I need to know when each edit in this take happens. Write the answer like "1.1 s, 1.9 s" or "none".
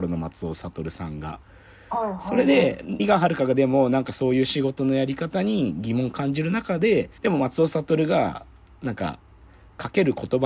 3.0 s, 7.2 s